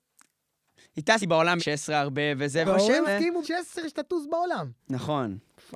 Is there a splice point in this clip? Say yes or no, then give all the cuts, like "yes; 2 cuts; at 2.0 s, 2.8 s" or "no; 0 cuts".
yes; 6 cuts; at 1.2 s, 1.6 s, 2.6 s, 3.1 s, 3.4 s, 4.8 s